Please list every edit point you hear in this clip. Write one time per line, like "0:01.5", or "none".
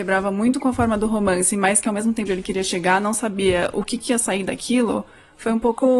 0:02.3